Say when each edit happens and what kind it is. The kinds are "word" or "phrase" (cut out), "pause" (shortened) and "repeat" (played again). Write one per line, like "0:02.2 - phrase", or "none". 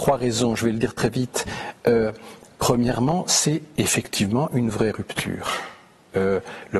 none